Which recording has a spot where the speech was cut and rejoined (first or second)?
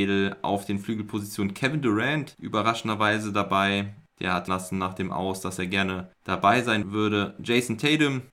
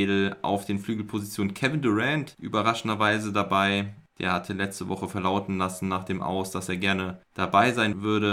first